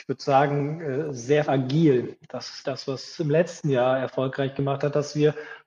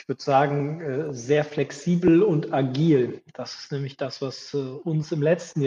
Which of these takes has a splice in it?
first; 3 cuts; at 1.4 s, 2.6 s, 3.2 s

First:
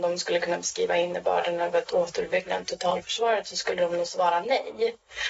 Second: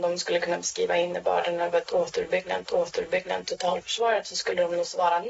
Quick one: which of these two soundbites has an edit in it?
second; 1 cut; at 2.6 s

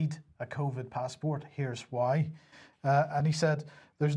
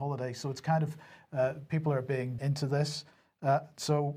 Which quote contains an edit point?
second; 1 cut; at 2.4 s

